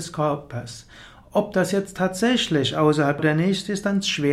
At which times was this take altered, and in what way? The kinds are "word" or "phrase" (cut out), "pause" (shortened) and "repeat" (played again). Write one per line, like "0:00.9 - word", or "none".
0:03.2 - phrase